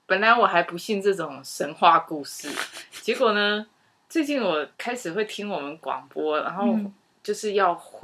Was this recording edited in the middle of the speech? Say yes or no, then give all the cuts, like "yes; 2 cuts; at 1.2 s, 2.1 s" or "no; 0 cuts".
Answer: yes; 1 cut; at 4.7 s